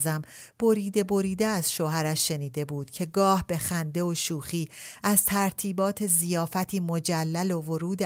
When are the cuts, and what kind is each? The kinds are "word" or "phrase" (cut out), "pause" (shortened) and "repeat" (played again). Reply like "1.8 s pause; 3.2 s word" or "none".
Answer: none